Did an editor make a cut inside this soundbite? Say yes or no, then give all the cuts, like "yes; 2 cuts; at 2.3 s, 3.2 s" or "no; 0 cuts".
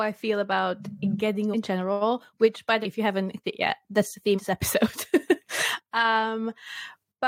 yes; 4 cuts; at 1.5 s, 2.8 s, 3.4 s, 4.4 s